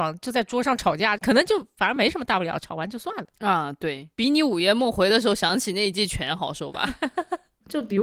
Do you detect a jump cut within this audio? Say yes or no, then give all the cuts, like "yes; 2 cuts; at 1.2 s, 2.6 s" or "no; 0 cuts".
yes; 2 cuts; at 1.2 s, 4.1 s